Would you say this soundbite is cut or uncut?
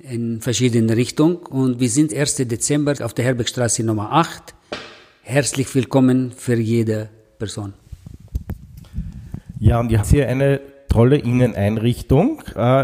cut